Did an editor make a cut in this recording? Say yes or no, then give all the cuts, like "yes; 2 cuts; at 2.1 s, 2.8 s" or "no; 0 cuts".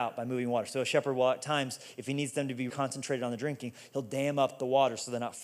yes; 1 cut; at 2.7 s